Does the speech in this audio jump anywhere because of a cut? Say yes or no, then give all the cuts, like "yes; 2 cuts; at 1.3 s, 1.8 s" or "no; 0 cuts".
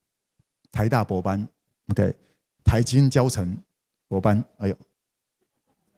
no; 0 cuts